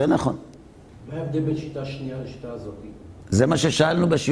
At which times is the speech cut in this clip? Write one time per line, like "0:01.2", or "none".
none